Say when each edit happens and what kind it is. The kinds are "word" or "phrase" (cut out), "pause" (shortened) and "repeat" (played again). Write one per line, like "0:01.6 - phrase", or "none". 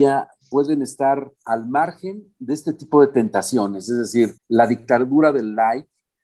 0:01.4 - pause
0:04.4 - pause